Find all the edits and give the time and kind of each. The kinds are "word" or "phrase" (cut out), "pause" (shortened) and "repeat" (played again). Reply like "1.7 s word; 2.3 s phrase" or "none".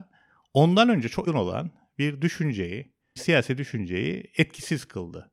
1.3 s word; 3.2 s word